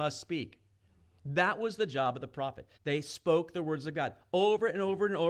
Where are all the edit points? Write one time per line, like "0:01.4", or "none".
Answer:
0:02.7